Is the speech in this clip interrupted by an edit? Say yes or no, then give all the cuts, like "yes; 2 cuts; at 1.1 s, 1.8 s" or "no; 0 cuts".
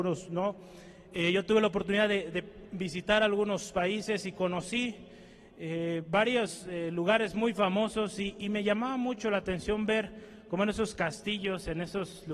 no; 0 cuts